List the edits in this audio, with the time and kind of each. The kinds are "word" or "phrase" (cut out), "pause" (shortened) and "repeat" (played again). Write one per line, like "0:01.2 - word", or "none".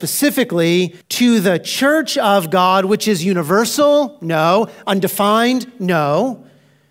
0:01.0 - pause